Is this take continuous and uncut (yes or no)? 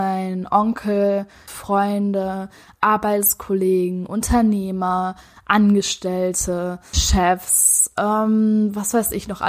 no